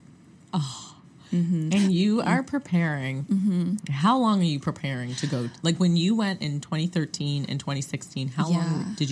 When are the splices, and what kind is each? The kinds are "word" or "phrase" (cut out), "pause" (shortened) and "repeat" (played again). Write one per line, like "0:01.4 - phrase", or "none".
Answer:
none